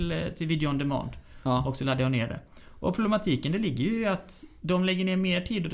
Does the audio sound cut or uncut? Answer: uncut